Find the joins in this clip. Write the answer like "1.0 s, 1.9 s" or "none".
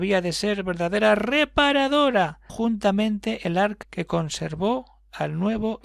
2.5 s, 3.8 s

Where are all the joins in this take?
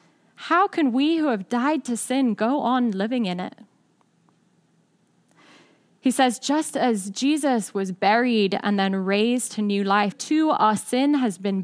10.1 s

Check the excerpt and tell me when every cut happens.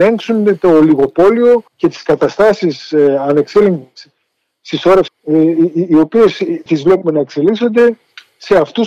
1.7 s, 5.1 s, 6.7 s

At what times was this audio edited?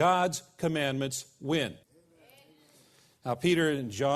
1.8 s

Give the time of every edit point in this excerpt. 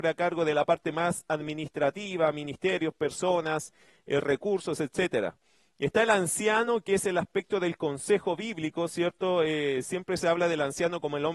none

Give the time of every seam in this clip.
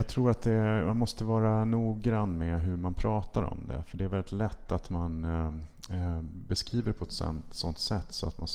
none

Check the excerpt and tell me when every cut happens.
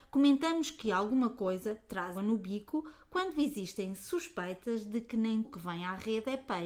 2.1 s, 5.4 s

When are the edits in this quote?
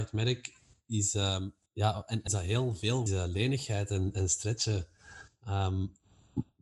1.7 s, 2.3 s, 3.1 s

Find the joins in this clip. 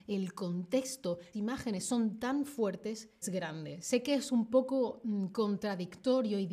1.3 s, 3.2 s

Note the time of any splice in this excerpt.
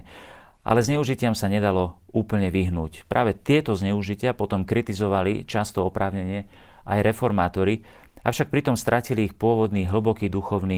none

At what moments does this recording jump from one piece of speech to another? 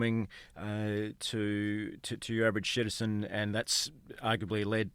none

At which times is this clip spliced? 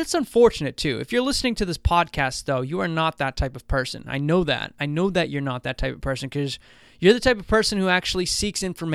none

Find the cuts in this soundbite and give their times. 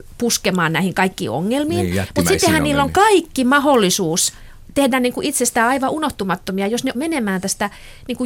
6.9 s

